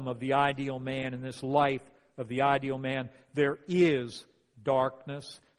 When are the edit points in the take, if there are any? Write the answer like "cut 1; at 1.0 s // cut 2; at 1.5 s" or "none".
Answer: none